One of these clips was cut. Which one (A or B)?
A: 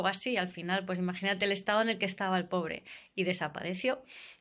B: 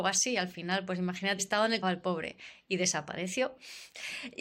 B